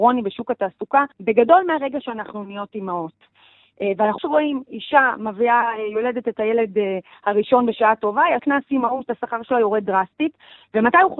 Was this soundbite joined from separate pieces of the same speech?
yes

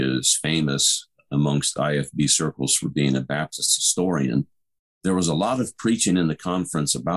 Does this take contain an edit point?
no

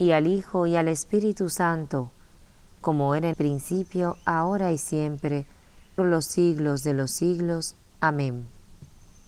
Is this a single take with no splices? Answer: no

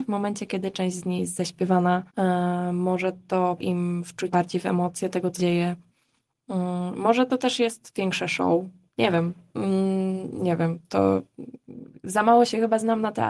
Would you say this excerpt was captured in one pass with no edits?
no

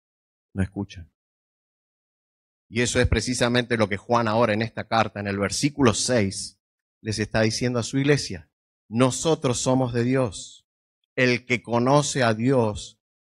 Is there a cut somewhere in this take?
yes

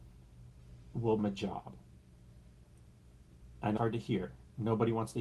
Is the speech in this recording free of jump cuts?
no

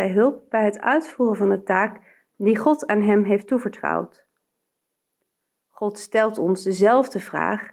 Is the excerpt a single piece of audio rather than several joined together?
yes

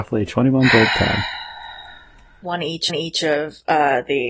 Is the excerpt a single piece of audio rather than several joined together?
no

